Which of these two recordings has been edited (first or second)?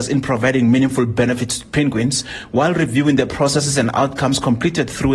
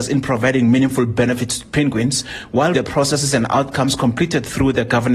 second